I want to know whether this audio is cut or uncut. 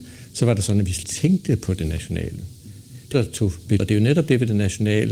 cut